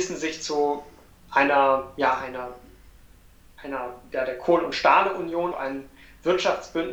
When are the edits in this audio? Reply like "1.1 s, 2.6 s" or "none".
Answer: 5.5 s